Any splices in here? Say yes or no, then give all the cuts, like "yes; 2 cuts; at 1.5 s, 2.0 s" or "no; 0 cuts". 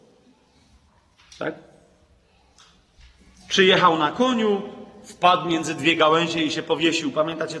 no; 0 cuts